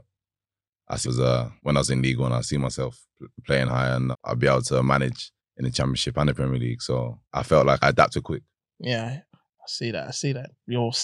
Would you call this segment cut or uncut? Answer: cut